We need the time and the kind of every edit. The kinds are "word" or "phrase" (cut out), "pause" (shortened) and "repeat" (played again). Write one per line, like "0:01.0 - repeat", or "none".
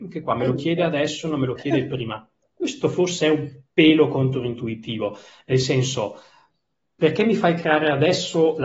none